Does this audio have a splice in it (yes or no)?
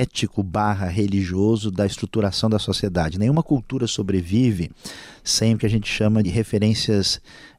yes